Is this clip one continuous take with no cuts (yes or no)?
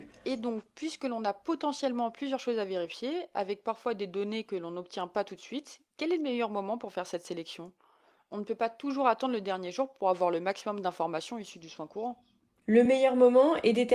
yes